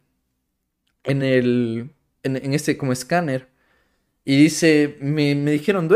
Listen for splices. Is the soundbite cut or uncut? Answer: uncut